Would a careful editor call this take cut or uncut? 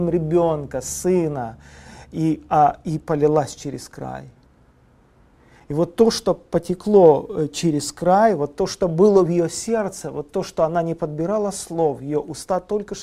uncut